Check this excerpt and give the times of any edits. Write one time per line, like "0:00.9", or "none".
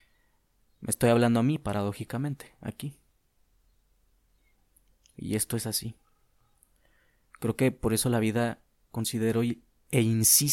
none